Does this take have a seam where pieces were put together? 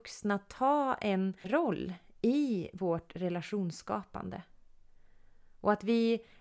yes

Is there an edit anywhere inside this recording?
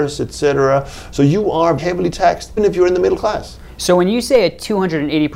yes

